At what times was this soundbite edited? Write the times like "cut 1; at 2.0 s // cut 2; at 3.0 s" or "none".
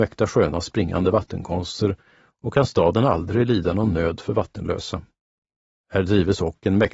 none